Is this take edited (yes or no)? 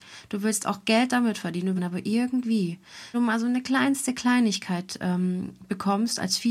yes